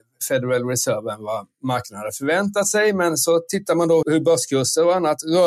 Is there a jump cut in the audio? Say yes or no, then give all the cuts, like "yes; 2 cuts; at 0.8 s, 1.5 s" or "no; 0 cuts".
yes; 1 cut; at 4.0 s